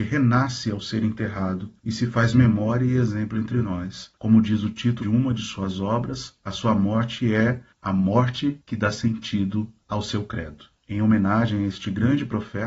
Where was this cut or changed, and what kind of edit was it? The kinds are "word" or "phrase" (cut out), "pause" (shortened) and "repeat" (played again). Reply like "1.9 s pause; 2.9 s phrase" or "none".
1.8 s pause; 4.2 s pause; 5.0 s word